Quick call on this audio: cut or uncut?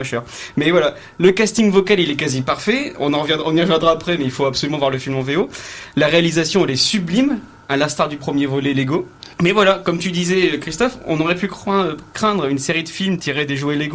cut